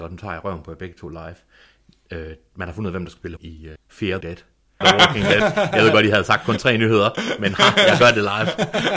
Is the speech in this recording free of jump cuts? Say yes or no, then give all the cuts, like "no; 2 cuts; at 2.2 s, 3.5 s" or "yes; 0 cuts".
no; 4 cuts; at 3.4 s, 3.8 s, 4.2 s, 4.8 s